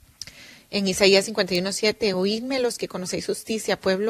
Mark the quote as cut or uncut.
uncut